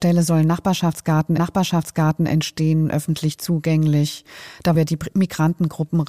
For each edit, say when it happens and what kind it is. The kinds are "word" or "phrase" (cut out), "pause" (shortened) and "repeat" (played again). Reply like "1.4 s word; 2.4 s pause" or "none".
1.4 s repeat; 4.7 s word